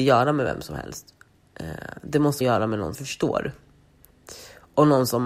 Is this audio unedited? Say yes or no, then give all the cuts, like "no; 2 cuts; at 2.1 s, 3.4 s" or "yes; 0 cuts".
no; 2 cuts; at 2.4 s, 2.9 s